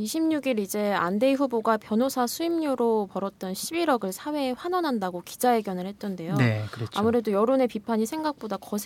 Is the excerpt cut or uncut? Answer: uncut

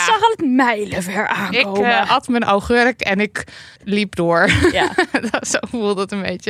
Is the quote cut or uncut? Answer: cut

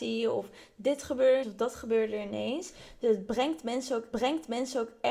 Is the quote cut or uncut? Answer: cut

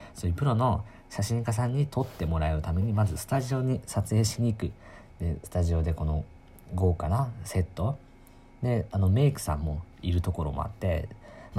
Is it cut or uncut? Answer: uncut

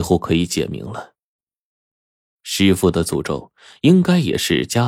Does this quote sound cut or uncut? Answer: uncut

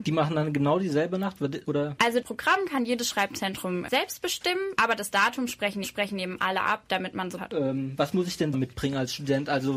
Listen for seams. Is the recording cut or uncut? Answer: cut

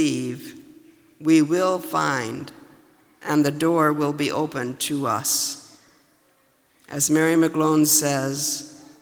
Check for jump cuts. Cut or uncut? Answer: uncut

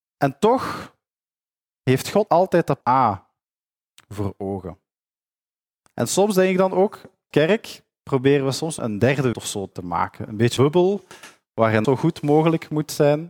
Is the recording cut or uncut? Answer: cut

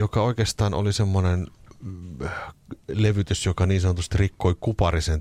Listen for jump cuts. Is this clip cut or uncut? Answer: uncut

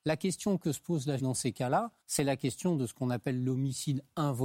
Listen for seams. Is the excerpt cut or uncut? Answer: cut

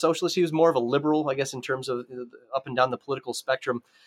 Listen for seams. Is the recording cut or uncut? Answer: uncut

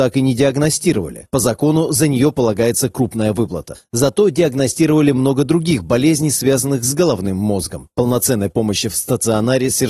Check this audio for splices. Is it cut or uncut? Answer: uncut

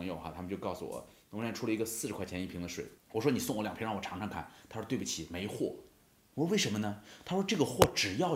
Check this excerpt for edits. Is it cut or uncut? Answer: cut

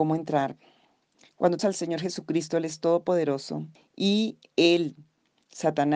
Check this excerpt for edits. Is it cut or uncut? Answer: cut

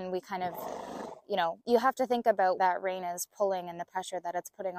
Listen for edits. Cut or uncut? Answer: cut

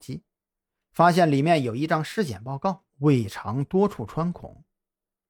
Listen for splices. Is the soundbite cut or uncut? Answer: cut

